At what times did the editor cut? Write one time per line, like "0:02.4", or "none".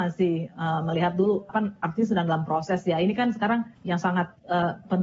0:01.5
0:03.8

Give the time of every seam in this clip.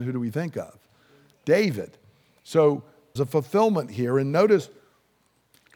0:03.2

